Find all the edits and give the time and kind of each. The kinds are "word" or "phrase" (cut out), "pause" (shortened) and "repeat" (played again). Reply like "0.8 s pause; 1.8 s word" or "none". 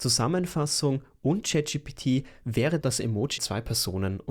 2.8 s word; 3.4 s word